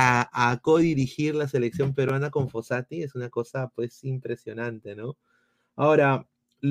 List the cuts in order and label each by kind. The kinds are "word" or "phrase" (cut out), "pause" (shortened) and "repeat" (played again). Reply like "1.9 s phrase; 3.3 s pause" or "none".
none